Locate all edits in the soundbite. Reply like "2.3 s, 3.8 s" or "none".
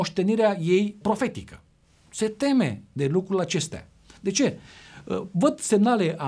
1.0 s